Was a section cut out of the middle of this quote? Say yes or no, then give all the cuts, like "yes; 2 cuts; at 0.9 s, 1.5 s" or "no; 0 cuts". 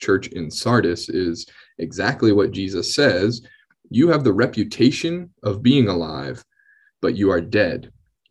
no; 0 cuts